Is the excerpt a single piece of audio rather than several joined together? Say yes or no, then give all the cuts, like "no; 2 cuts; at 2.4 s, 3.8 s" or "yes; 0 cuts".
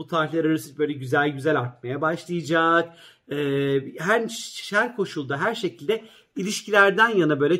yes; 0 cuts